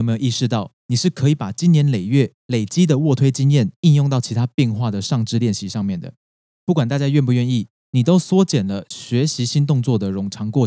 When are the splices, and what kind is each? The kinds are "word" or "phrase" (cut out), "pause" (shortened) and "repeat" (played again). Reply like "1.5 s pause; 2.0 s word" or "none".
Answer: 2.4 s pause